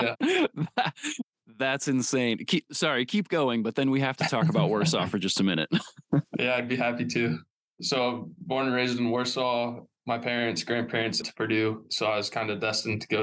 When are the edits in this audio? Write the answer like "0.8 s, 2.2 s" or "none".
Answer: 11.2 s